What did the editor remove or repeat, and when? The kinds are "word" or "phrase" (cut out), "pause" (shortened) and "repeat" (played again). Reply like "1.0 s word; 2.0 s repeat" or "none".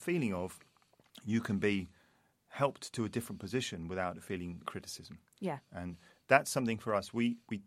4.6 s word